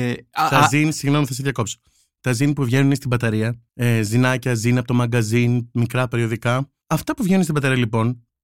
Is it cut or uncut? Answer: cut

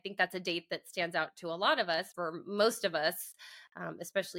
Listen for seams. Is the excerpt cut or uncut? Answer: cut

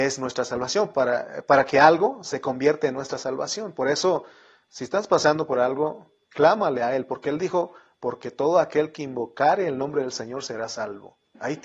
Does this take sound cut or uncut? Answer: uncut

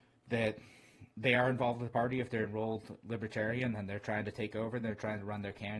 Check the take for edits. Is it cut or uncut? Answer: uncut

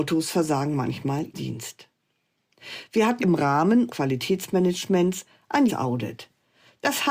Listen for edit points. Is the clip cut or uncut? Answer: cut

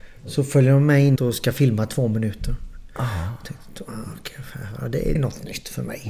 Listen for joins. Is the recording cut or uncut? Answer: cut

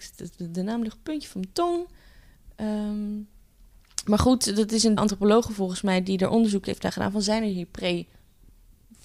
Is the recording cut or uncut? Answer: cut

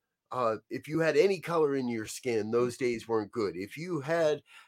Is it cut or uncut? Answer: uncut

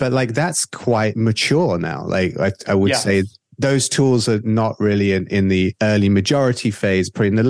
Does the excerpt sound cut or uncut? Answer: uncut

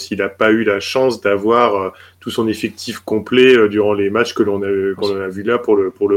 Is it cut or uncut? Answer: uncut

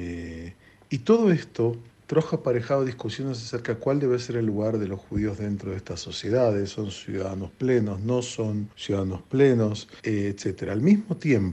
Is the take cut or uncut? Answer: cut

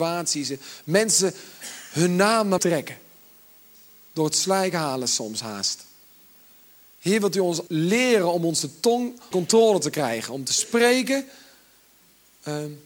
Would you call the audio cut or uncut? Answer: cut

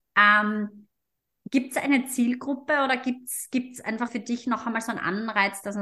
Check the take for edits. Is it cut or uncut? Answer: cut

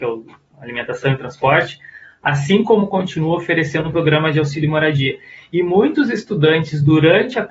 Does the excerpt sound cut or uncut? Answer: uncut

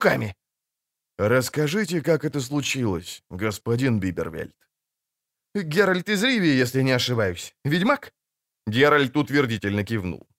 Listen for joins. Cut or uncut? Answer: uncut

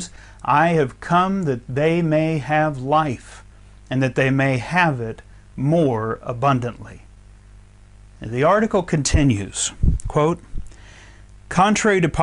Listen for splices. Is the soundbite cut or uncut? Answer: uncut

